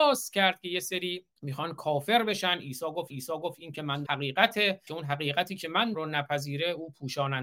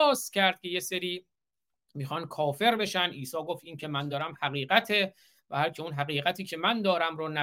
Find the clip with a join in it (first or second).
first